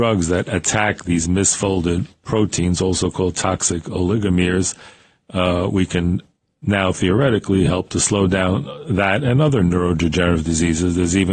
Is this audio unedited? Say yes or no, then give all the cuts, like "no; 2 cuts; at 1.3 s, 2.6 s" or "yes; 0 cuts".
yes; 0 cuts